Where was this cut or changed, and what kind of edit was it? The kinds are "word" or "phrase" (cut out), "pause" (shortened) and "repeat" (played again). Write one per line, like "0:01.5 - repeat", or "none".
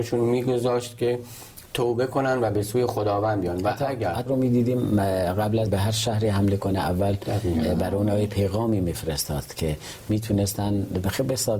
0:04.3 - word
0:05.7 - word

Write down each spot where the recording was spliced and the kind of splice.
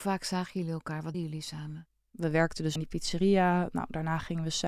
0:01.1 - word
0:02.8 - word

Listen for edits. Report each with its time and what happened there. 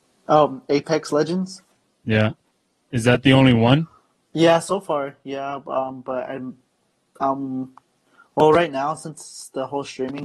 none

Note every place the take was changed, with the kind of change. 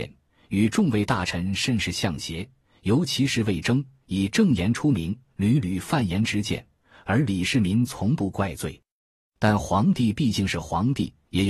none

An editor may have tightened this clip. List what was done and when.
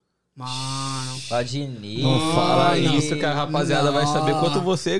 none

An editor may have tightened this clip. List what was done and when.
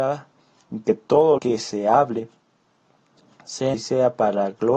0:01.4 - word
0:03.7 - word

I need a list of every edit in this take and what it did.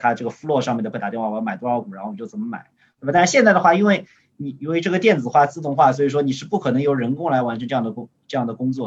0:00.9 - word

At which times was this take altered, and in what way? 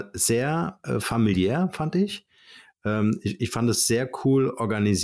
none

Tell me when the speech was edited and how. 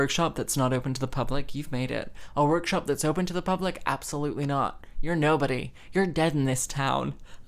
none

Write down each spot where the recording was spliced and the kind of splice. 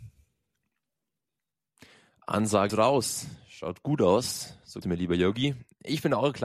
0:02.7 - word
0:04.8 - word

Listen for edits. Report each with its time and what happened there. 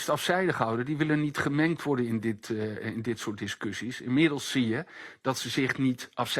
none

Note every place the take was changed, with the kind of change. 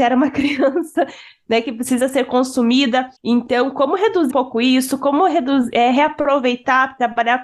0:03.2 - pause
0:04.3 - word

